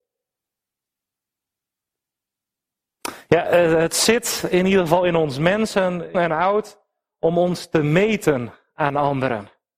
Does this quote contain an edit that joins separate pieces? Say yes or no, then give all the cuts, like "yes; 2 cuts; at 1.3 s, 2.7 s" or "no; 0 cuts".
yes; 1 cut; at 6.1 s